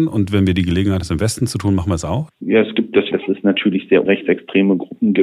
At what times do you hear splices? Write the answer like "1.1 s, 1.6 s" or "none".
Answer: 1.0 s, 2.3 s, 3.1 s, 4.1 s